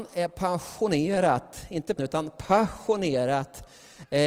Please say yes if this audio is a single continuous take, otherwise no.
no